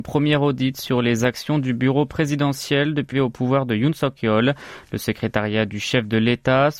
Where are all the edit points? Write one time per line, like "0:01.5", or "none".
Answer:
0:03.1

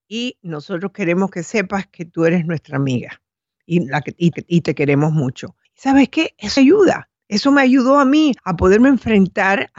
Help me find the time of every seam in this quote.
0:04.3
0:05.6
0:06.6
0:07.2
0:08.4

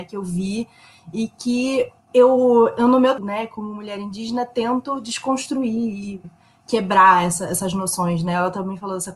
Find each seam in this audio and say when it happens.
0:02.0
0:03.2
0:06.2

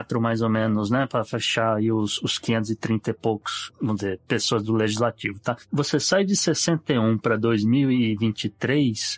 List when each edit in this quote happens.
none

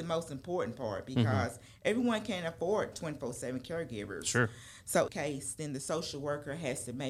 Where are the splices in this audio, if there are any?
0:02.9
0:05.1

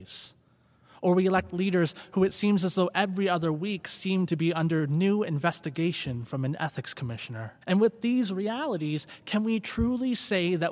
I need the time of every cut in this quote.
0:07.6

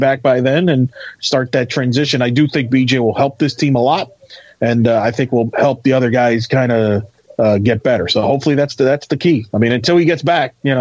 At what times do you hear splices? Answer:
none

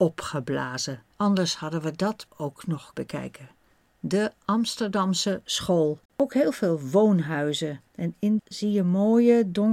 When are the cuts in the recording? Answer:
0:01.1
0:02.3
0:02.9
0:06.1
0:07.9
0:08.4

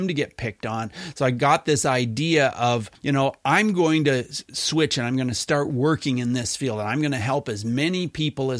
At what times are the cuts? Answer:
0:03.0

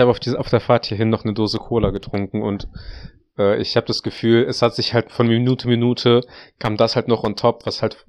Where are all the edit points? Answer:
none

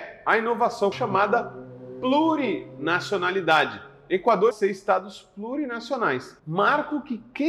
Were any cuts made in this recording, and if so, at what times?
0:00.9
0:04.5
0:06.4

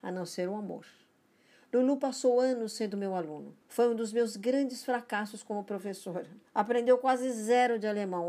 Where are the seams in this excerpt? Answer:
0:03.6
0:06.4

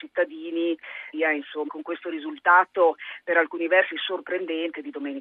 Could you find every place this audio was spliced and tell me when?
0:01.1
0:01.7

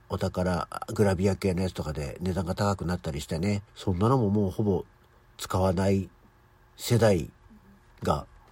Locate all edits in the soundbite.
0:03.7

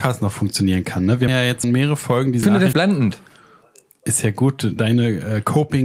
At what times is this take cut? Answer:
0:01.3
0:01.6
0:02.4
0:02.7
0:04.8

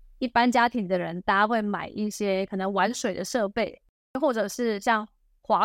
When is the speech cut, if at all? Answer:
none

